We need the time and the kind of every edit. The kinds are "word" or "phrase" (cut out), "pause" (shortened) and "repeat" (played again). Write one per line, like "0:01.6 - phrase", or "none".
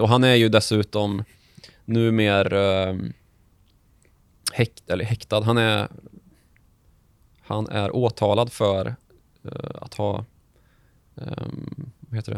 none